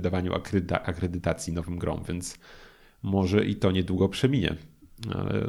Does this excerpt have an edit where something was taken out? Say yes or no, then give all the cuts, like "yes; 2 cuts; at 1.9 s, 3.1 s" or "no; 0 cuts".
no; 0 cuts